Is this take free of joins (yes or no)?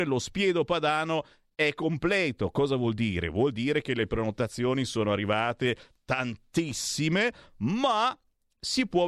yes